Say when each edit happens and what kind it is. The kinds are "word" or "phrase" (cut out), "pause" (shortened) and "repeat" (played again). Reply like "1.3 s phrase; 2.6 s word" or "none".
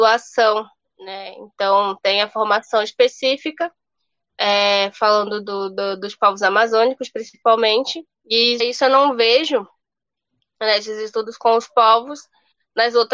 8.6 s word